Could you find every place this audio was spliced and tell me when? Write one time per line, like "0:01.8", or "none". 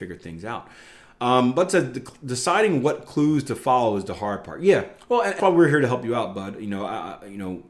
0:05.4